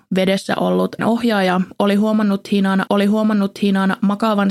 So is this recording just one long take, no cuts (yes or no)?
no